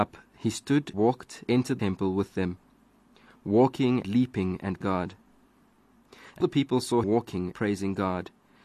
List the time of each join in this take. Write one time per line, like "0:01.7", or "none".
0:00.9
0:01.5
0:01.8
0:04.0
0:04.8
0:06.4
0:07.0
0:07.5